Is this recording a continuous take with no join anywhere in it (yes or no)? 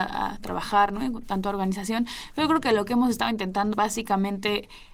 no